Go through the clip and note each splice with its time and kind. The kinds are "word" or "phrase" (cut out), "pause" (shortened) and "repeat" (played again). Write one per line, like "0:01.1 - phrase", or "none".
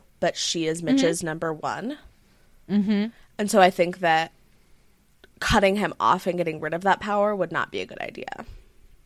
none